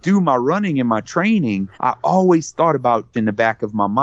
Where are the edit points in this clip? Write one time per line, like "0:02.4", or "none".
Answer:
0:01.7
0:03.1